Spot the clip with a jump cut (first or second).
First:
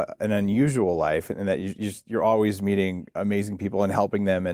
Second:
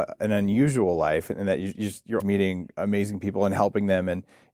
second